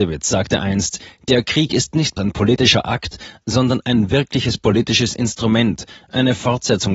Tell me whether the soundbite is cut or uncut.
cut